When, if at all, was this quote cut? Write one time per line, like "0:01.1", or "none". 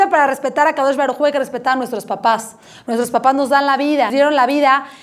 0:04.1